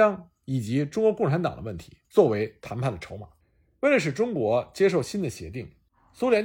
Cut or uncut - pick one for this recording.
cut